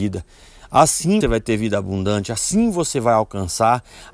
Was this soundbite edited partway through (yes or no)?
yes